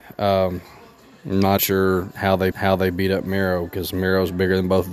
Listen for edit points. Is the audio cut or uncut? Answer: cut